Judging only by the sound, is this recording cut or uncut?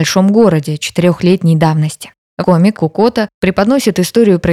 cut